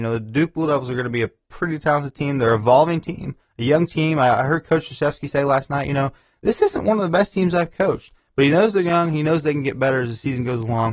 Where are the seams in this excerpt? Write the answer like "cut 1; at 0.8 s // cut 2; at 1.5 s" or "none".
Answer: none